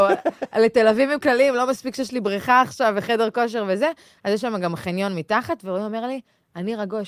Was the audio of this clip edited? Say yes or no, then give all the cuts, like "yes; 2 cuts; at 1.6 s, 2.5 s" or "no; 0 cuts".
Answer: no; 0 cuts